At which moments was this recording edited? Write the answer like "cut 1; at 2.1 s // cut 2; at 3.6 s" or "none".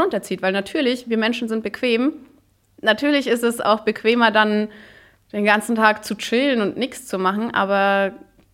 none